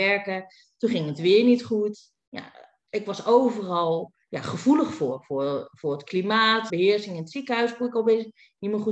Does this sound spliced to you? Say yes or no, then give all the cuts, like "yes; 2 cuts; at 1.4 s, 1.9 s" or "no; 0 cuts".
yes; 2 cuts; at 4.2 s, 6.7 s